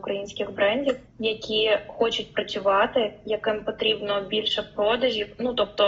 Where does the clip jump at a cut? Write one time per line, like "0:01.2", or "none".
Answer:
0:01.1